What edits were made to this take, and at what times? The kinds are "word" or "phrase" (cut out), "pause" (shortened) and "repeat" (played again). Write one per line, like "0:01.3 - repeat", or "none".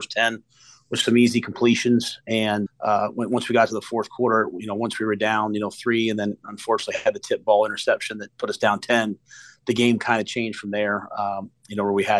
0:02.7 - word